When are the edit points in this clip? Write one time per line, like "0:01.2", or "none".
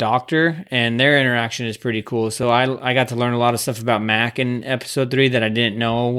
none